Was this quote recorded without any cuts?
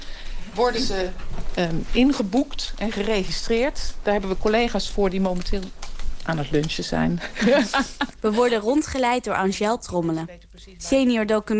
yes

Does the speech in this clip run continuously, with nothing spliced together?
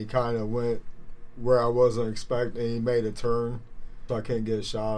no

